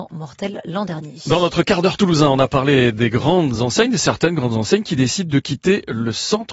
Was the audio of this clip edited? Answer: no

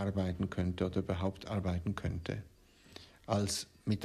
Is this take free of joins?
yes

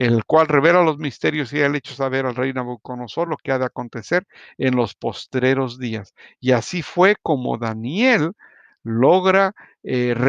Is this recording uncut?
yes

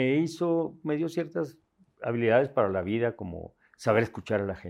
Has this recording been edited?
no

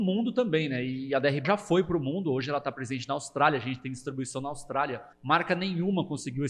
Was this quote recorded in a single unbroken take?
no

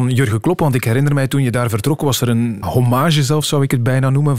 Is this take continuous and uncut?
no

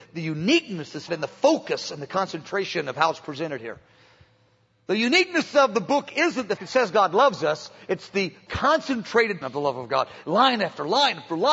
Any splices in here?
yes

